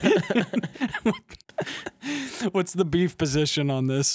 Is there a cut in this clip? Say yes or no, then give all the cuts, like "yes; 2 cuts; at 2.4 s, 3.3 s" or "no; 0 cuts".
no; 0 cuts